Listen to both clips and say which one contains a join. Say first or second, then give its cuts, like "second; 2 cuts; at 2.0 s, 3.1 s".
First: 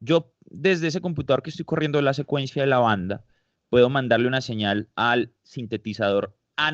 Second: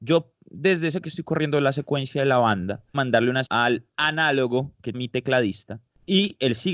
second; 5 cuts; at 1.0 s, 2.9 s, 3.5 s, 3.9 s, 4.9 s